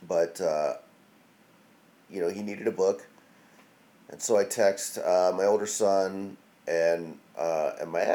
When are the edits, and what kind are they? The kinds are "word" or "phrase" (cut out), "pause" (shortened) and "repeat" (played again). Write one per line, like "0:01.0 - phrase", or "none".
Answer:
none